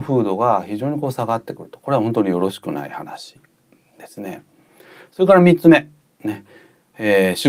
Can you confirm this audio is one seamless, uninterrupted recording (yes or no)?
yes